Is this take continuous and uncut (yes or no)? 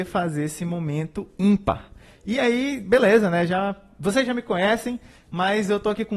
yes